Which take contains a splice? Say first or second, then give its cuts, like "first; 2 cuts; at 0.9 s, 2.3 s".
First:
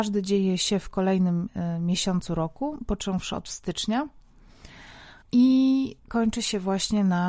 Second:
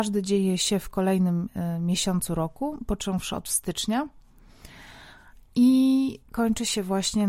first; 1 cut; at 5.2 s